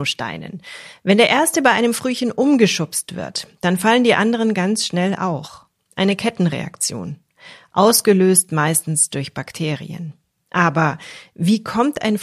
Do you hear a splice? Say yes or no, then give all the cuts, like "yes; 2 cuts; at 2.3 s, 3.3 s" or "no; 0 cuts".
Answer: no; 0 cuts